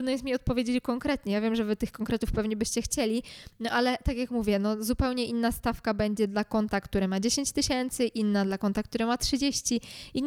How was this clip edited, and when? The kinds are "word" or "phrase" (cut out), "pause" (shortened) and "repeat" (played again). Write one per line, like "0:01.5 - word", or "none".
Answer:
none